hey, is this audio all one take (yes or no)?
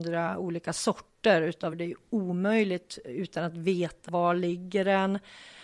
no